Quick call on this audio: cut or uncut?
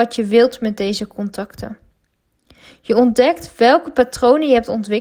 uncut